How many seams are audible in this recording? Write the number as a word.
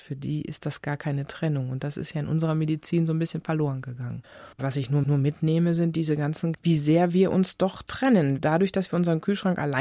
three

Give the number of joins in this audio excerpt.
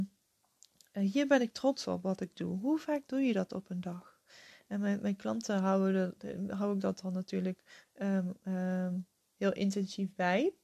zero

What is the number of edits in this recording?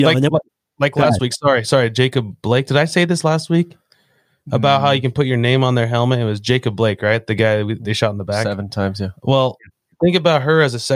zero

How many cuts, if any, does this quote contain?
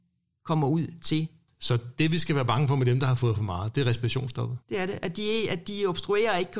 one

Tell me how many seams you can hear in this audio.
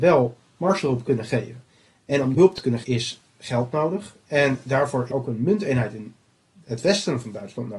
three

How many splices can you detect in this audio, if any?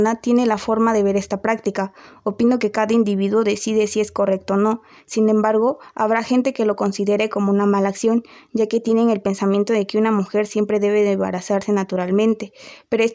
zero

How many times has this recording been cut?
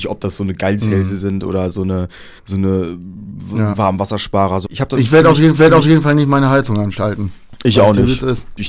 three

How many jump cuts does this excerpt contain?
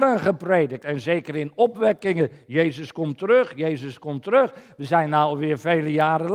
zero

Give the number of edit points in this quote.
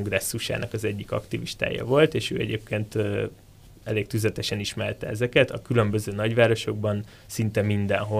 zero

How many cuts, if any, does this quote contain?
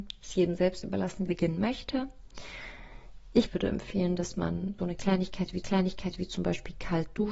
four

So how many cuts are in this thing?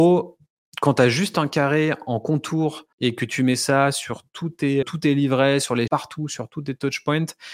three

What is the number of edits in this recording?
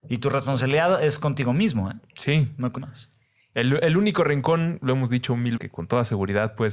two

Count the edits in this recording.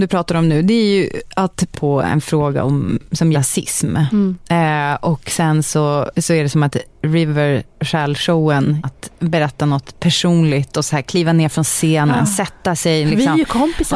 four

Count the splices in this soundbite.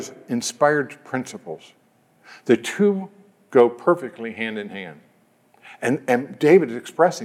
zero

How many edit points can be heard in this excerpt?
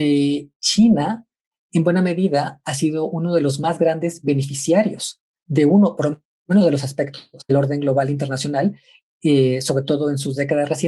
one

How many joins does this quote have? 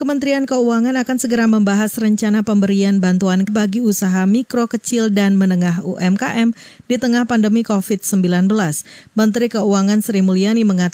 one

